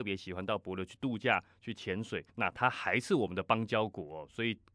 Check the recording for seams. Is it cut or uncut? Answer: cut